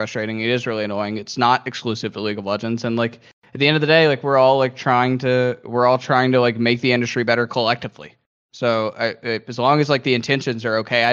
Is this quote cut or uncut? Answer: uncut